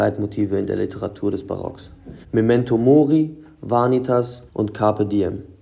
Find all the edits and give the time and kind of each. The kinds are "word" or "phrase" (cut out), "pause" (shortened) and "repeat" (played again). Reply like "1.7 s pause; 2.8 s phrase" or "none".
2.2 s pause; 4.5 s pause